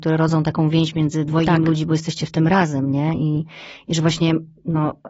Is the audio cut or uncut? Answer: uncut